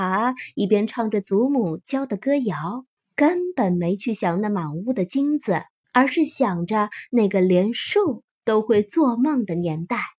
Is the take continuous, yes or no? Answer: no